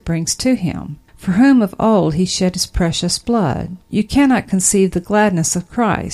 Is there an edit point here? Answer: yes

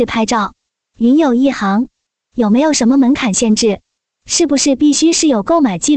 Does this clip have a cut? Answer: no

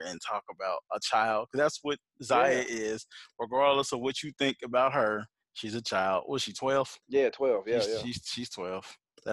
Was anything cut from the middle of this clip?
yes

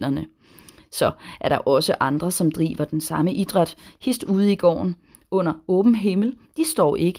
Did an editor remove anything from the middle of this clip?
no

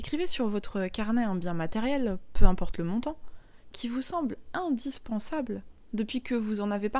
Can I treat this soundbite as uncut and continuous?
yes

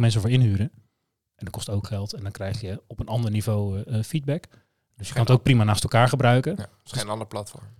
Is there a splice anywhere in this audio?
no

